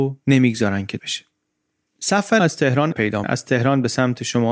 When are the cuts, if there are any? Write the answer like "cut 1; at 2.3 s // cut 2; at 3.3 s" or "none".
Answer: cut 1; at 1.0 s // cut 2; at 2.4 s // cut 3; at 2.9 s // cut 4; at 3.2 s